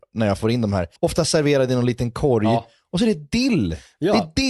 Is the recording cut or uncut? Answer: cut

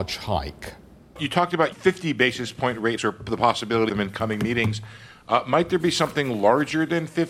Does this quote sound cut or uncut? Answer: cut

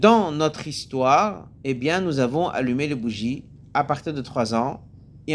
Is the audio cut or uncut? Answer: cut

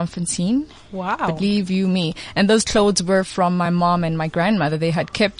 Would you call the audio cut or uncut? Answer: uncut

